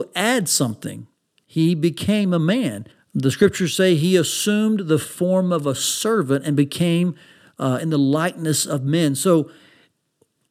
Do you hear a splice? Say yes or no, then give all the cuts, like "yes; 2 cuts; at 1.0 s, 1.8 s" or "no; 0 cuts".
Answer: yes; 1 cut; at 2.9 s